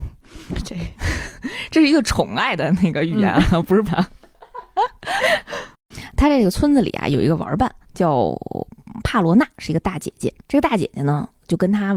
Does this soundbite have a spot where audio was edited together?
yes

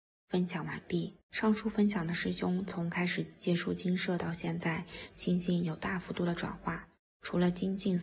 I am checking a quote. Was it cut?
yes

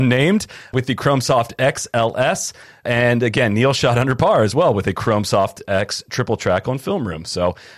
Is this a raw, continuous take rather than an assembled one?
yes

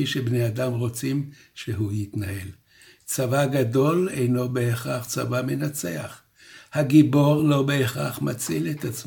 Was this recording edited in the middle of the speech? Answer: no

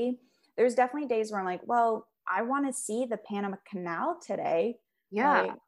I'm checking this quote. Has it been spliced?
yes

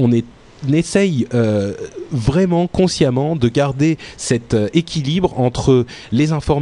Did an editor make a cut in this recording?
no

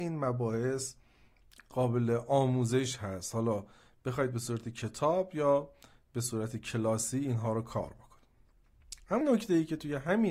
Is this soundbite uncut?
no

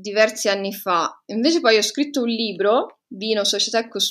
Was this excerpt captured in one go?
yes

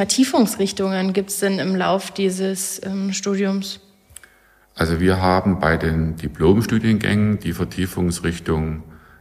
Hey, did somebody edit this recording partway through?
no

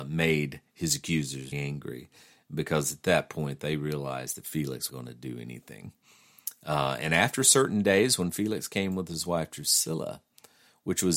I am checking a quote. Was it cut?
yes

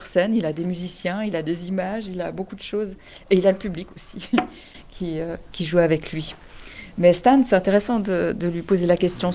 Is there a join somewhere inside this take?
no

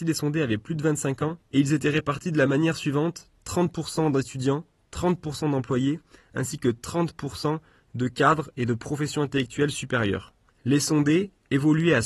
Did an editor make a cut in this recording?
no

